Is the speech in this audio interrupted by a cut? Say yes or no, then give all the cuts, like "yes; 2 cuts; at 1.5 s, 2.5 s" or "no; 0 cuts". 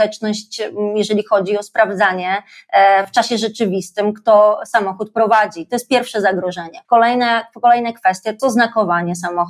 yes; 2 cuts; at 6.8 s, 8.4 s